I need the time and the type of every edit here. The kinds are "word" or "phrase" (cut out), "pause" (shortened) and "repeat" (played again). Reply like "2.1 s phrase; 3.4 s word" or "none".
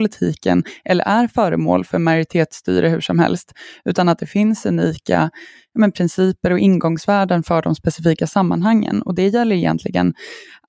none